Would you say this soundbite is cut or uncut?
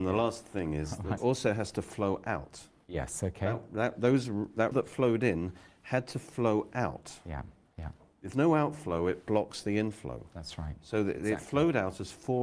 cut